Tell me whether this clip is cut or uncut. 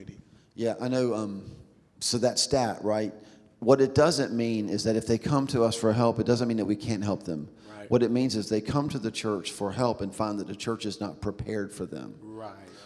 uncut